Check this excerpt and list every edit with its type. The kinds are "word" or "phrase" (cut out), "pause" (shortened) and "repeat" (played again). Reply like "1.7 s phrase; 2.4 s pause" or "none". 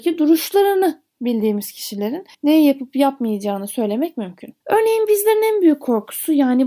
2.3 s pause; 4.6 s pause

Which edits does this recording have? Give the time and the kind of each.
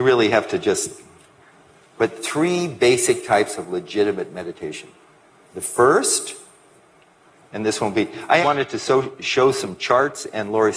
8.4 s word

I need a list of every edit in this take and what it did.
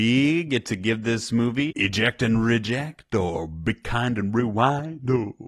1.7 s phrase

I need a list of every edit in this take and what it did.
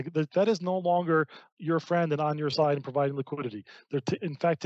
none

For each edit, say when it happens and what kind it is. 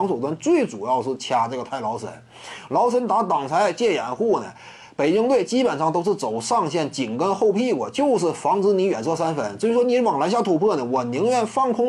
none

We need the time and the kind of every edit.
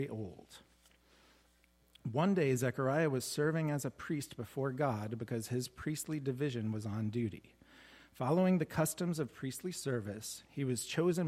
none

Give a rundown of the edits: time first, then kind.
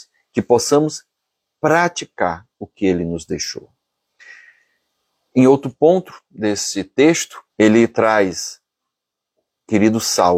2.5 s pause; 7.5 s pause

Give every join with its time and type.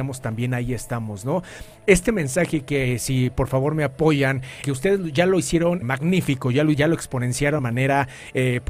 4.6 s word; 5.8 s word; 6.7 s word; 7.6 s word

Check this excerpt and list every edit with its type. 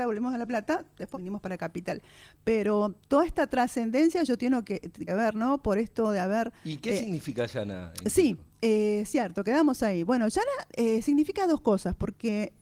1.1 s word; 5.1 s phrase

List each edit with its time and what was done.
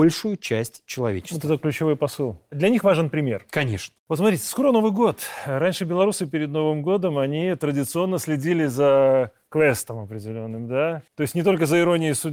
4.0 s pause; 11.1 s pause

